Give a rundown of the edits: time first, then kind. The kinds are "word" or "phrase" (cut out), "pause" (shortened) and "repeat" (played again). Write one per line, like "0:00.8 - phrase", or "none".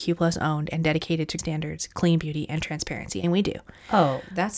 0:01.4 - word
0:03.2 - word